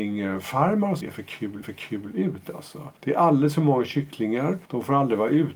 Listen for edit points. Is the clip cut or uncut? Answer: cut